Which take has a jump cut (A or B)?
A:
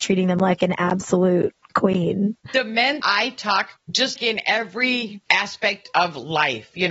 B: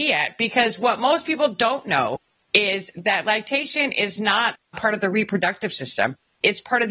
A